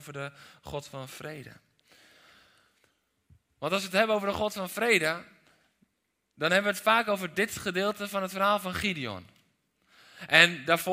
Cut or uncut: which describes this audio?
uncut